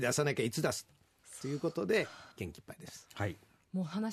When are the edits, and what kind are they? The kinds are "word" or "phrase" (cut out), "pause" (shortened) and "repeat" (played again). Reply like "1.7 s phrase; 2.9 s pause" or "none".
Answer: 2.3 s pause